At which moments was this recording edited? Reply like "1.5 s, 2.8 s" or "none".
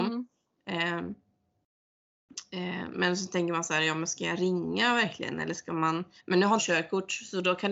2.9 s, 6.2 s, 6.6 s